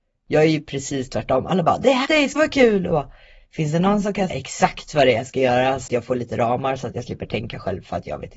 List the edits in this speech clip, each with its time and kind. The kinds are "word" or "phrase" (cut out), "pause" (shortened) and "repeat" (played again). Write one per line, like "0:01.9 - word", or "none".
0:02.1 - word
0:02.4 - word
0:02.9 - word
0:03.4 - word
0:04.3 - word
0:05.9 - word